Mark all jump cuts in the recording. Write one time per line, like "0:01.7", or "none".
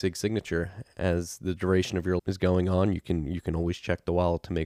0:02.2